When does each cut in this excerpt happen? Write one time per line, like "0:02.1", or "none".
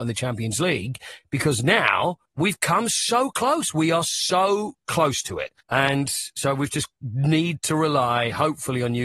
0:02.2
0:05.6